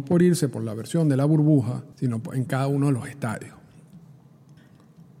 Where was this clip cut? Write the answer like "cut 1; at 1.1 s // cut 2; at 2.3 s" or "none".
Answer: cut 1; at 1.9 s